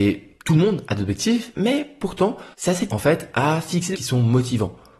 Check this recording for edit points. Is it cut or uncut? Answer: cut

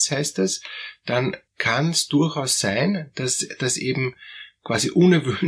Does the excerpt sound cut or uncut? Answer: cut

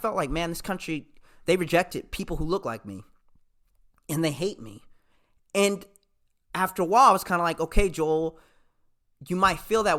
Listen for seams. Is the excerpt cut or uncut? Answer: uncut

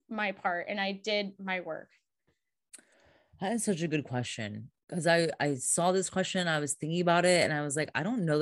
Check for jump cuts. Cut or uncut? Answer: uncut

